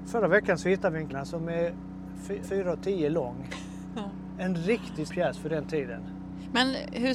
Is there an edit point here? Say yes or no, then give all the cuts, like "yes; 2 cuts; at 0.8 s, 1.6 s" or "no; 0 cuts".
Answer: yes; 3 cuts; at 1.1 s, 2.4 s, 5.1 s